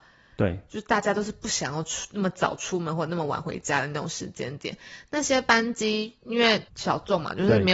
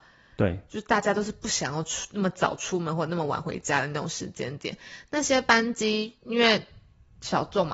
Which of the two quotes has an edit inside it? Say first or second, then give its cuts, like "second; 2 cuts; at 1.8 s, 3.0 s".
first; 1 cut; at 6.7 s